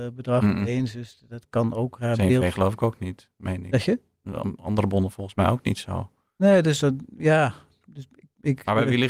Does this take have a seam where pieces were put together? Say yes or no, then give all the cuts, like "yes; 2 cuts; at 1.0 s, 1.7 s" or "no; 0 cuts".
no; 0 cuts